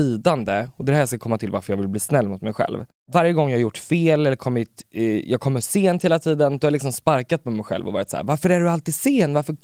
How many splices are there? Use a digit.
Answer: 0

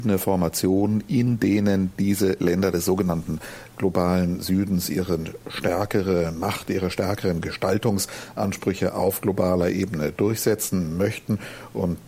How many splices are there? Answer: 0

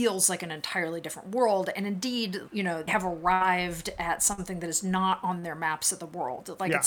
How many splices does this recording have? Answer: 2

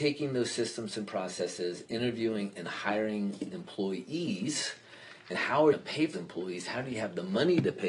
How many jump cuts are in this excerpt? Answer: 4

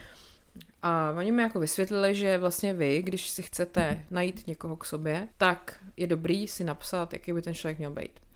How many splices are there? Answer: 1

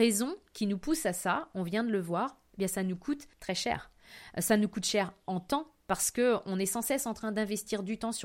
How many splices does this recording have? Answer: 1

